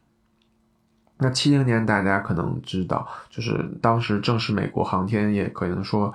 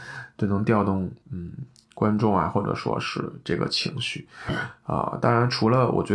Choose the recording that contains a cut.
second; 1 cut; at 1.2 s

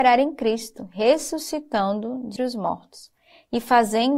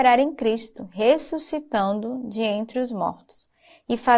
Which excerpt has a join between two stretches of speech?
first; 1 cut; at 2.4 s

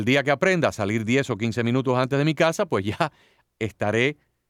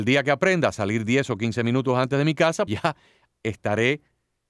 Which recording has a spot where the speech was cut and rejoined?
second; 1 cut; at 2.7 s

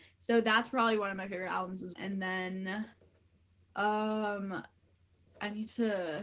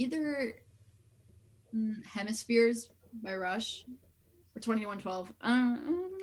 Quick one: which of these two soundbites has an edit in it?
first; 1 cut; at 1.9 s

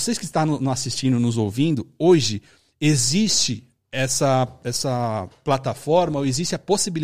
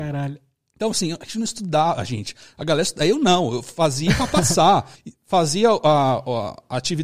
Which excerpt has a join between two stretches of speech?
second; 1 cut; at 4.9 s

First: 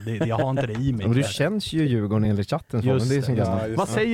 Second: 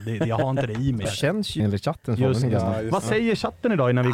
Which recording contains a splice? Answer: second; 3 cuts; at 1.0 s, 1.6 s, 2.4 s

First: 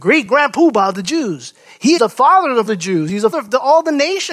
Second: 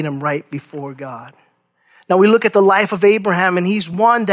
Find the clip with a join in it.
first; 3 cuts; at 2.0 s, 2.7 s, 3.3 s

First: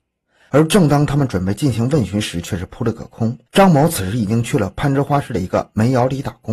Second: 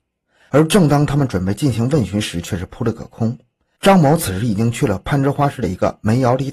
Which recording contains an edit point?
first; 1 cut; at 3.5 s

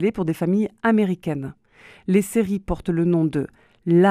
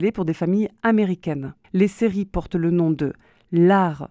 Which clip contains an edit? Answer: second; 1 cut; at 1.6 s

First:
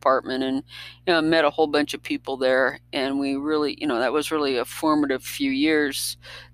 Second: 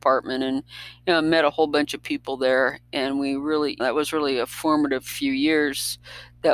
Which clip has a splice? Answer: second; 1 cut; at 3.8 s

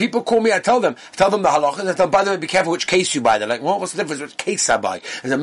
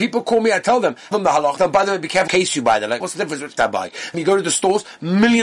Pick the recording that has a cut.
second; 6 cuts; at 1.1 s, 1.6 s, 2.3 s, 3.0 s, 3.6 s, 4.1 s

